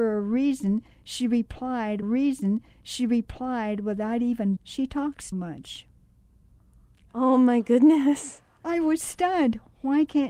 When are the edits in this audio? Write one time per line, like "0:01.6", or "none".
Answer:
0:02.0
0:04.6
0:05.3